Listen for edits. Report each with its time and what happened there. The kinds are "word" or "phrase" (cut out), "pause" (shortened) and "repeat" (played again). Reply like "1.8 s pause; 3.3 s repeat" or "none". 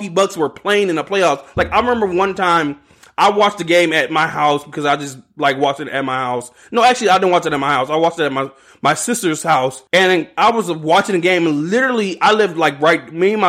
9.9 s pause